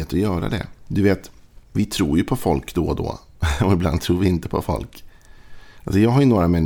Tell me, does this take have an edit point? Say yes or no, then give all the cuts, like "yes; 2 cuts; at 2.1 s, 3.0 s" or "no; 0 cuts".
yes; 1 cut; at 1.6 s